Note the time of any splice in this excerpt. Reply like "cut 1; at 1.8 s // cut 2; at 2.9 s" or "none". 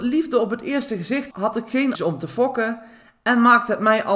cut 1; at 1.3 s // cut 2; at 1.9 s